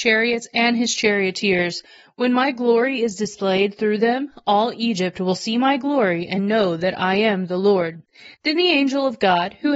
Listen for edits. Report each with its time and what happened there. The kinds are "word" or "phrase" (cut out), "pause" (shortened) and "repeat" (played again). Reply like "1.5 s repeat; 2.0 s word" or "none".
none